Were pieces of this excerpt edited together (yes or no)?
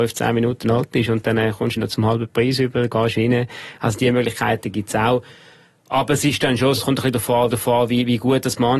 yes